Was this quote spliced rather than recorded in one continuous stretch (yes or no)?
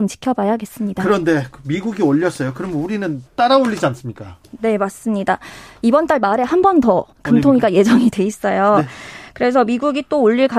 yes